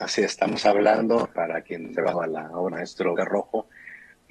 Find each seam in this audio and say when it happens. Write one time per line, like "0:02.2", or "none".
0:01.3
0:02.1
0:02.7
0:03.2